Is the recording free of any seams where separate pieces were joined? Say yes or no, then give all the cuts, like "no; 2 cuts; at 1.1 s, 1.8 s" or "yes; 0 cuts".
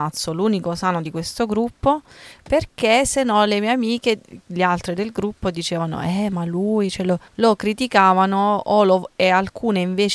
no; 1 cut; at 7.3 s